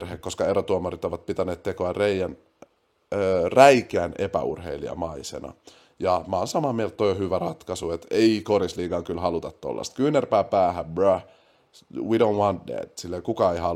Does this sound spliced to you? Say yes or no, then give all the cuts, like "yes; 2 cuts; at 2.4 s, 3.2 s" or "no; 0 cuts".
no; 0 cuts